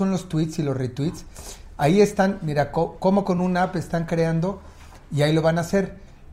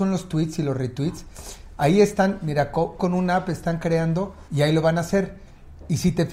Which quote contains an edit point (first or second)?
second